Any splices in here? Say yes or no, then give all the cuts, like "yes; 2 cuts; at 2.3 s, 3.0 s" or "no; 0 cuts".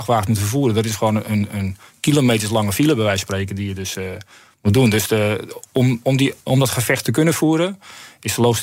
yes; 1 cut; at 6.4 s